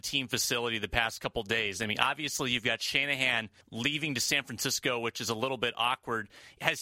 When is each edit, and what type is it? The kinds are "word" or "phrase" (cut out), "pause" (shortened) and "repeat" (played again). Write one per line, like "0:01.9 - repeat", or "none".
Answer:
0:03.6 - pause

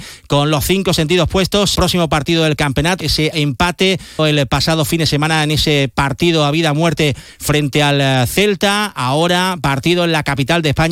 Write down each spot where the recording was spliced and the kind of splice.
0:01.8 - phrase
0:03.0 - phrase
0:03.3 - word
0:04.2 - word

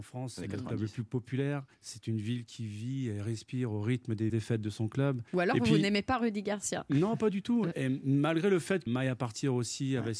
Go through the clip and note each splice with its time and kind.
0:01.7 - pause
0:04.3 - phrase
0:05.3 - pause
0:07.7 - word
0:08.9 - phrase

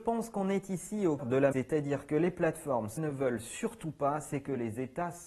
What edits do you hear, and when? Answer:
0:01.2 - word
0:01.5 - word
0:03.0 - word

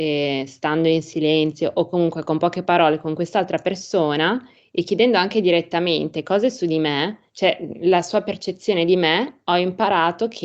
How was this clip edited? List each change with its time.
0:07.3 - pause

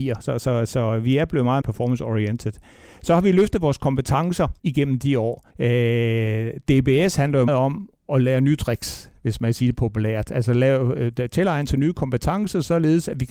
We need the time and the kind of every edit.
0:01.6 - word
0:04.6 - word
0:05.5 - pause
0:07.5 - word

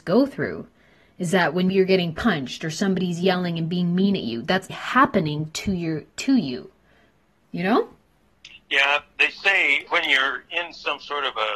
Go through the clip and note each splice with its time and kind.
0:01.7 - word
0:04.7 - word
0:09.9 - word

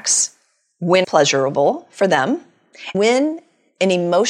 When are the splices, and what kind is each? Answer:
0:01.0 - word
0:02.9 - word

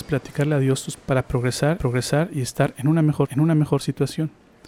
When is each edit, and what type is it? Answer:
0:01.0 - word
0:01.8 - repeat
0:03.3 - repeat

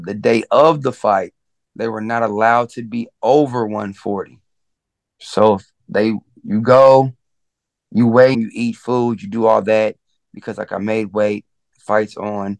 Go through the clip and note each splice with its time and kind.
0:08.3 - phrase

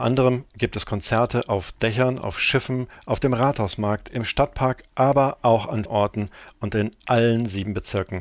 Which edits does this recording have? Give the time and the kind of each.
0:05.9 - word

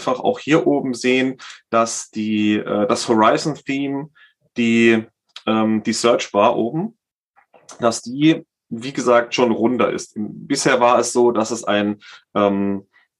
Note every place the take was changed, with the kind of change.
none

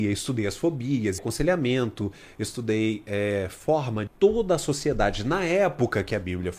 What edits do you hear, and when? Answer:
0:01.2 - word
0:04.1 - phrase

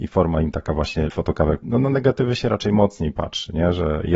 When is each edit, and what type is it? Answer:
0:01.1 - word
0:01.6 - word

